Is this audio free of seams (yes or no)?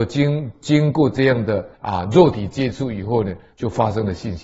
no